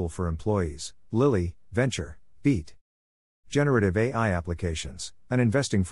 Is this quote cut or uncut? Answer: uncut